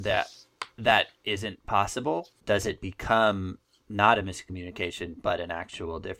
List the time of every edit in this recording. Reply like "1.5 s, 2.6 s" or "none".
none